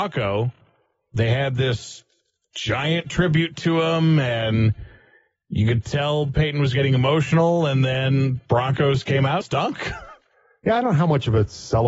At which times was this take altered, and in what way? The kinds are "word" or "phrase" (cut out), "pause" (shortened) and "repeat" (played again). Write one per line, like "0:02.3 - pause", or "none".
0:09.4 - phrase